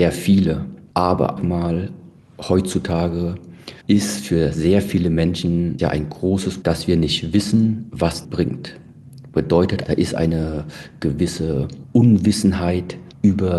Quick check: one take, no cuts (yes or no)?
no